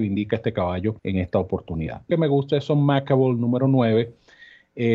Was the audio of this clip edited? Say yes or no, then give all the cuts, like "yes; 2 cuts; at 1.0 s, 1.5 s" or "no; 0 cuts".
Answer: yes; 2 cuts; at 1.0 s, 2.1 s